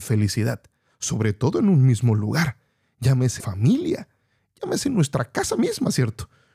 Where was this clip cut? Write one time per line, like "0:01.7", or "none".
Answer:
0:03.4